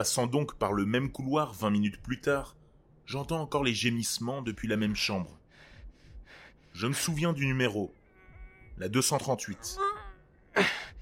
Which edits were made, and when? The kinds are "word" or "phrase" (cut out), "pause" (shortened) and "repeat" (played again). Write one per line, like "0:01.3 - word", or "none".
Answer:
none